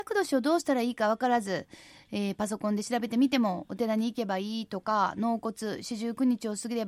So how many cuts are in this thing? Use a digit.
0